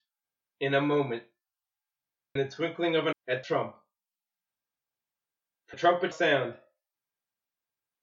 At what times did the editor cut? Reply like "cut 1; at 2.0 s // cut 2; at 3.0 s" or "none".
cut 1; at 2.4 s // cut 2; at 3.1 s // cut 3; at 3.4 s // cut 4; at 5.7 s // cut 5; at 6.1 s